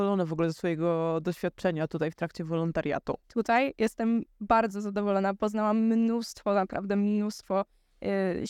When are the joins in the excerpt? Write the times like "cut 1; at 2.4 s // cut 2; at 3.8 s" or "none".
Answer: cut 1; at 3.2 s